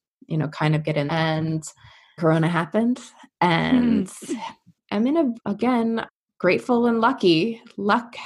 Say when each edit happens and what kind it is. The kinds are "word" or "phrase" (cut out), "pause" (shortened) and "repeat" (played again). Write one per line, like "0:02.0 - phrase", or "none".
0:01.1 - word
0:02.2 - word
0:05.3 - word